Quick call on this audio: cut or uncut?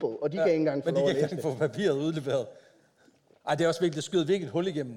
uncut